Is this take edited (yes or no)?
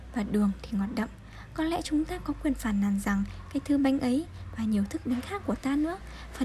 no